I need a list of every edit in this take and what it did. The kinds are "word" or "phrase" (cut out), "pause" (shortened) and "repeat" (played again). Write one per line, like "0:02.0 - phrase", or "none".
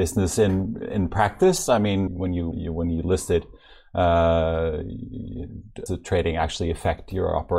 0:02.1 - word
0:02.5 - word
0:05.9 - phrase